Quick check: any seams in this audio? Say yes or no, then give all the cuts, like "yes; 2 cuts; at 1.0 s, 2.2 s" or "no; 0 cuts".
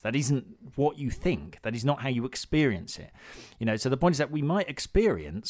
no; 0 cuts